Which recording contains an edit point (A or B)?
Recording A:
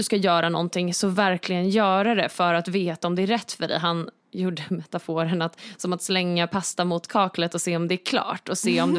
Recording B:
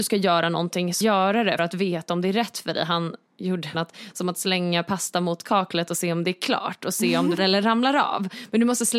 B